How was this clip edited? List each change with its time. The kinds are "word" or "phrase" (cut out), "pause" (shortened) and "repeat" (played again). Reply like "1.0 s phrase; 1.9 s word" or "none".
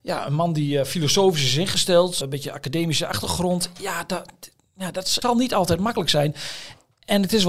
2.2 s word; 5.2 s word